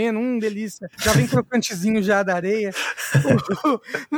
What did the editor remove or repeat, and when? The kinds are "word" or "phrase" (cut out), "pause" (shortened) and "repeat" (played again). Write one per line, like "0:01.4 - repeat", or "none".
0:00.9 - pause